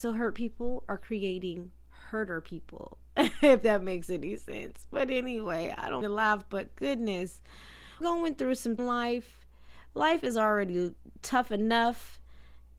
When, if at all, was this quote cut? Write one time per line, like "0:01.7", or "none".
0:06.0
0:08.0
0:08.8